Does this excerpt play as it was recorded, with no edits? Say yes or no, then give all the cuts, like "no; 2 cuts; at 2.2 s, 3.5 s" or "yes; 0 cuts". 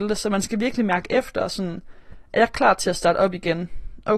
yes; 0 cuts